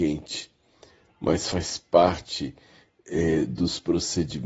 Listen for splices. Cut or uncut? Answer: uncut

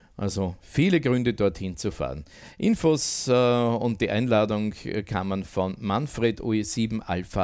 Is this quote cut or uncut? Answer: uncut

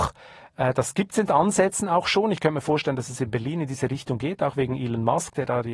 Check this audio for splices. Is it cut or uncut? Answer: uncut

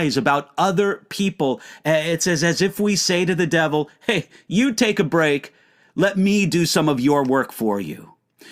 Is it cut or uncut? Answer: uncut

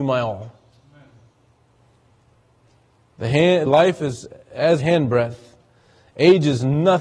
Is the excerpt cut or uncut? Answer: cut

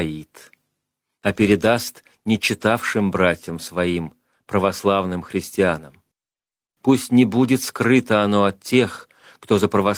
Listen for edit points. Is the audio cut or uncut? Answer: uncut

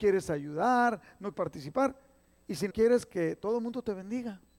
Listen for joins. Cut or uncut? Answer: cut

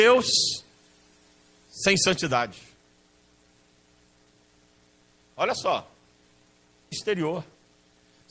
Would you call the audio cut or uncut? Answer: cut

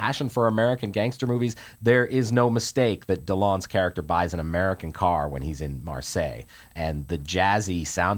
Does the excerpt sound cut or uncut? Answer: uncut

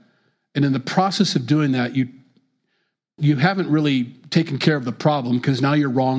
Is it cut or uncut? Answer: cut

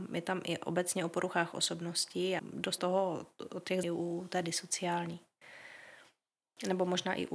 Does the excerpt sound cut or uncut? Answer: cut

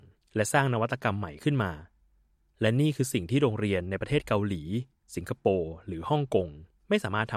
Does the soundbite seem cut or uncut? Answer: uncut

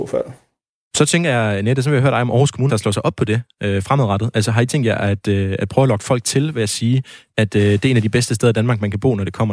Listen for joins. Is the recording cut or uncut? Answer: cut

